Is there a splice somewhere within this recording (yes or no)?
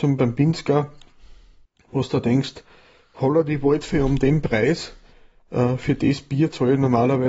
no